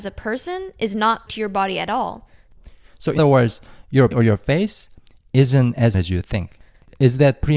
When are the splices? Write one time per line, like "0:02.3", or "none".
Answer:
0:01.3
0:03.2
0:04.1
0:05.9